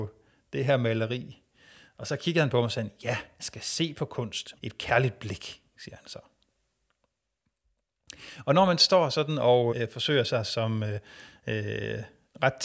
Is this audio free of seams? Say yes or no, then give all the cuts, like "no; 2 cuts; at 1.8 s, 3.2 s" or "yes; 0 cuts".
no; 3 cuts; at 3.4 s, 4.6 s, 9.7 s